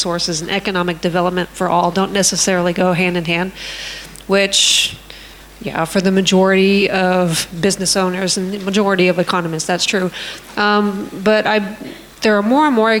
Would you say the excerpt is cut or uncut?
uncut